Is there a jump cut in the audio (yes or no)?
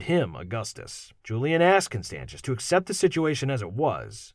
yes